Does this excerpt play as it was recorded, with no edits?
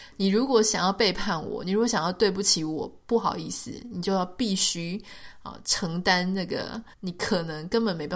no; 1 cut; at 6.9 s

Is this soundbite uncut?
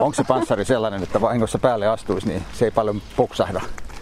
no; 1 cut; at 1.2 s

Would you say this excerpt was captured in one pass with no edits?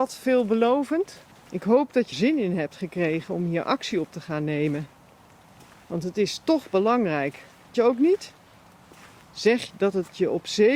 no; 4 cuts; at 1.3 s, 2.1 s, 7.7 s, 9.7 s

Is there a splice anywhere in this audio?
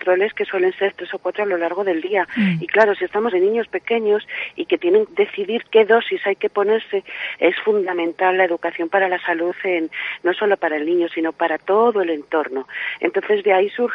yes; 2 cuts; at 3.3 s, 5.1 s

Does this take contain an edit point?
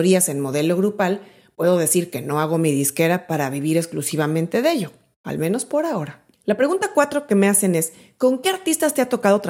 no; 0 cuts

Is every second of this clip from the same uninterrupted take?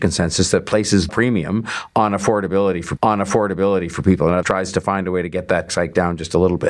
no; 4 cuts; at 1.1 s, 3.0 s, 4.4 s, 5.7 s

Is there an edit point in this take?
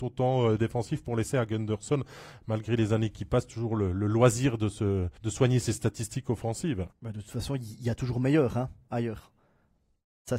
yes; 2 cuts; at 5.2 s, 6.9 s

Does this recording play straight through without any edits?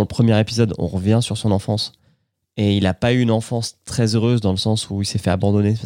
yes; 0 cuts

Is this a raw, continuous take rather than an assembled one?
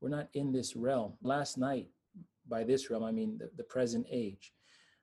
no; 1 cut; at 1.2 s

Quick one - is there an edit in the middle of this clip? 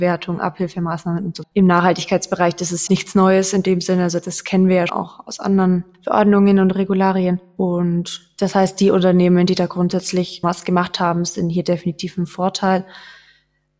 yes; 4 cuts; at 1.4 s, 2.9 s, 4.9 s, 10.4 s

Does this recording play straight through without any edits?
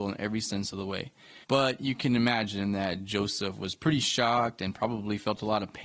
no; 1 cut; at 1.4 s

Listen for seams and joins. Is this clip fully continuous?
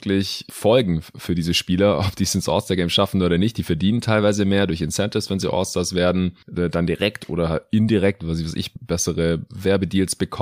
yes; 0 cuts

